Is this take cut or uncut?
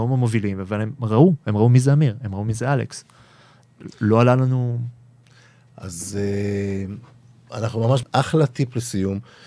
cut